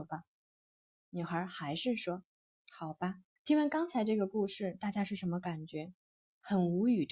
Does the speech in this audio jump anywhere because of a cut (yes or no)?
yes